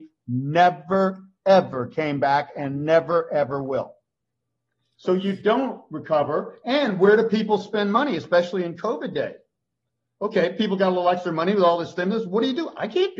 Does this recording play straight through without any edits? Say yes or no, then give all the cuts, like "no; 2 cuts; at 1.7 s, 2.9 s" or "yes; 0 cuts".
yes; 0 cuts